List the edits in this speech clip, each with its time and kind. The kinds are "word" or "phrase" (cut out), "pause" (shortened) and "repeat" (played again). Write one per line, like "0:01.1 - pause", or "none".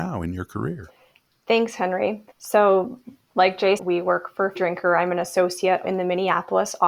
0:02.3 - pause
0:03.8 - word
0:04.6 - word
0:05.8 - word